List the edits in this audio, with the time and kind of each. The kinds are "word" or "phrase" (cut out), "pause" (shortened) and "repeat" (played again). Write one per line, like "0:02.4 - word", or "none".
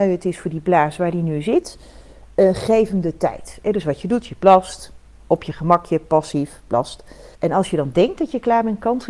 0:07.3 - pause